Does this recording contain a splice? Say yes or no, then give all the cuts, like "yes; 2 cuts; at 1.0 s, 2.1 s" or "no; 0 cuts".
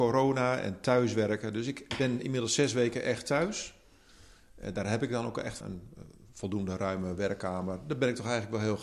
yes; 1 cut; at 5.6 s